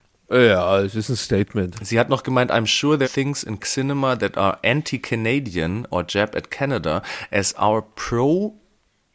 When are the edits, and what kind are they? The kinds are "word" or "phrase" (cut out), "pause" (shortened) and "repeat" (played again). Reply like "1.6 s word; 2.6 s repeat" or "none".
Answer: 3.0 s word; 3.6 s word